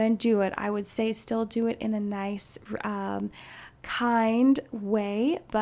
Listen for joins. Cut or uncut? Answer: uncut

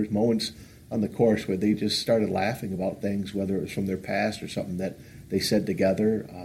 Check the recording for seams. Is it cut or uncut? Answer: uncut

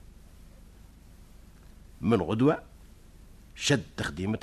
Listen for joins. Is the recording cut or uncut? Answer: uncut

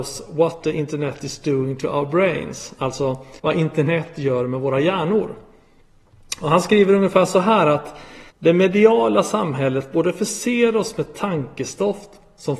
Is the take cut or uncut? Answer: cut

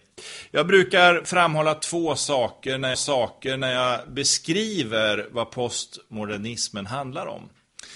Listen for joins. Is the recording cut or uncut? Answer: cut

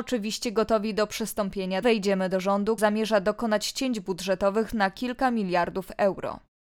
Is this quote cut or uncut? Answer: cut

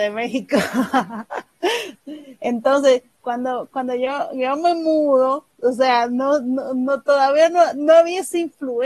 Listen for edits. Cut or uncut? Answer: uncut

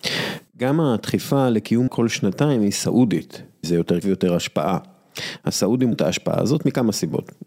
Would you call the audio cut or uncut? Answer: cut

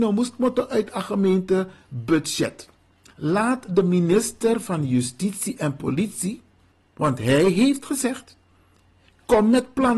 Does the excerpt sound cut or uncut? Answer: uncut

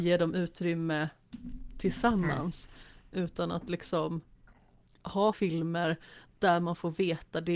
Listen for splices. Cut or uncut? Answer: cut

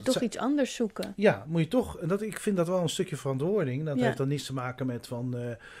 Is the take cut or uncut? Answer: uncut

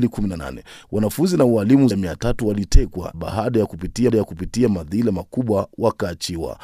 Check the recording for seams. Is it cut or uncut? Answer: cut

